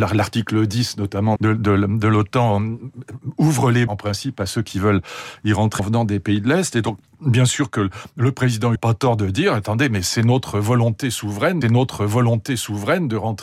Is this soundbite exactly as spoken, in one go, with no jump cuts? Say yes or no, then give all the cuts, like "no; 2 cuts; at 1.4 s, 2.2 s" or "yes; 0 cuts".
no; 5 cuts; at 1.4 s, 3.9 s, 5.8 s, 8.8 s, 11.6 s